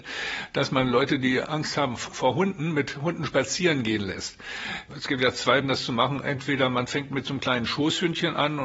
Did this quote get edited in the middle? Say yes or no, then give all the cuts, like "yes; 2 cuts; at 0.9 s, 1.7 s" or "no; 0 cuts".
yes; 1 cut; at 5.6 s